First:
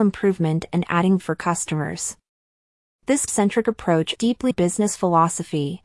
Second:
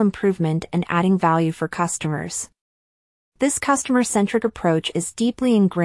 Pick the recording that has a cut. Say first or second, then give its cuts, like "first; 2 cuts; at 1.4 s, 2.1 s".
first; 4 cuts; at 1.2 s, 3.3 s, 4.2 s, 4.5 s